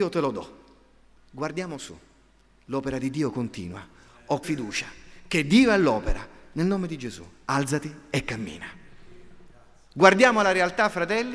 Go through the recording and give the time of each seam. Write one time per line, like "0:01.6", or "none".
0:04.4
0:09.5